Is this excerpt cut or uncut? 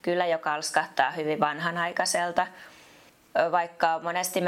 uncut